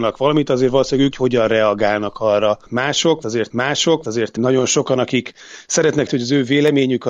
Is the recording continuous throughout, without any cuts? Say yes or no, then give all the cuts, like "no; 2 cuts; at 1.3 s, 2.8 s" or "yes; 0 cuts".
no; 3 cuts; at 1.1 s, 3.5 s, 6.1 s